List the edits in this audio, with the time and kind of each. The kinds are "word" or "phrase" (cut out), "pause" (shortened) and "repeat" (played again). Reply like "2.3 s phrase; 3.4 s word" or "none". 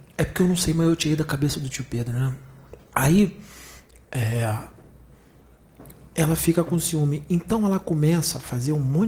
2.8 s pause